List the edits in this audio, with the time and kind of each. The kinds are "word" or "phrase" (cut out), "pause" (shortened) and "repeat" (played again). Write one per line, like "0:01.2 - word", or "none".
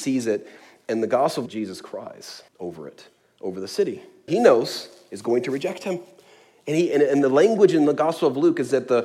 0:01.5 - phrase
0:02.5 - pause
0:04.3 - phrase